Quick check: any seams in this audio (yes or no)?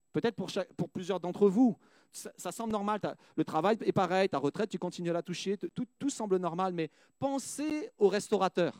no